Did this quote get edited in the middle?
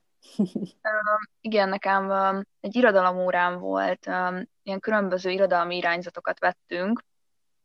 yes; 2 cuts; at 1.3 s, 2.5 s

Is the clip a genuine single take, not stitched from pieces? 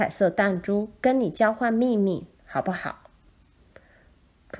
no; 1 cut; at 2.3 s

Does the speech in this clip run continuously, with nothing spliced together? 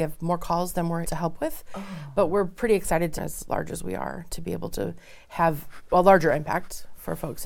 no; 3 cuts; at 1.0 s, 3.2 s, 5.9 s

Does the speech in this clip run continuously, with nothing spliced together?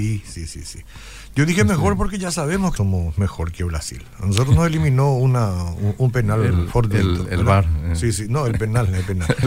no; 1 cut; at 2.8 s

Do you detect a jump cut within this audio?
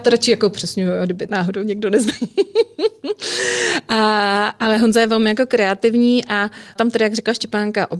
yes; 2 cuts; at 1.3 s, 6.8 s

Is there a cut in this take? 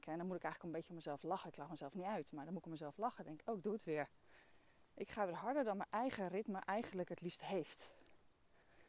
no; 0 cuts

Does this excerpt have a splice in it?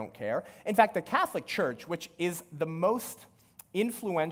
no; 0 cuts

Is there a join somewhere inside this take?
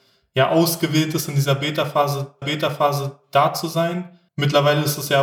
yes; 2 cuts; at 2.4 s, 4.3 s

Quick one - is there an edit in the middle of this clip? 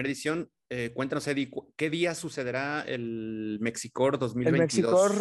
no; 0 cuts

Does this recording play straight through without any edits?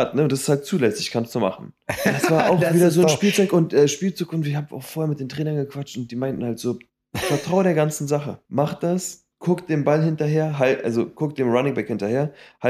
no; 3 cuts; at 6.9 s, 8.4 s, 9.3 s

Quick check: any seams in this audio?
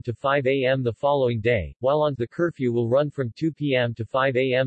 yes; 1 cut; at 2.2 s

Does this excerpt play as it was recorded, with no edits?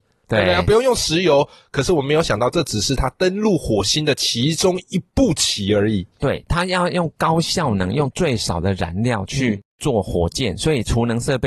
yes; 0 cuts

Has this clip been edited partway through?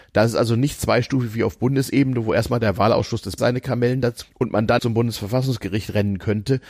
yes; 3 cuts; at 3.4 s, 4.2 s, 4.8 s

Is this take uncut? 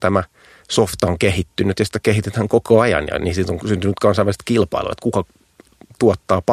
yes; 0 cuts

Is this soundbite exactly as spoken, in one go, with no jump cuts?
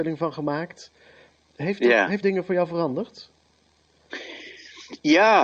no; 1 cut; at 2.2 s

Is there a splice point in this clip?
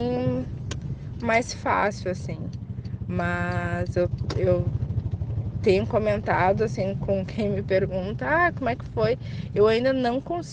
no; 0 cuts

